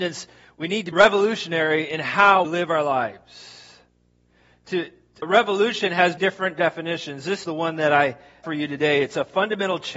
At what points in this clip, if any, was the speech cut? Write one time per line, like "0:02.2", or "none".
0:00.9
0:02.4
0:05.2
0:06.2
0:07.4
0:08.4